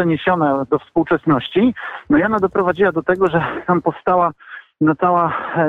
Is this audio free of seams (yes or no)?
yes